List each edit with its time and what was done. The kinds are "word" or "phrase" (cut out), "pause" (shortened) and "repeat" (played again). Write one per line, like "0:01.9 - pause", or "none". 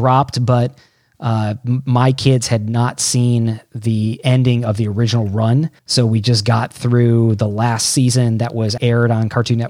0:05.8 - pause
0:08.8 - word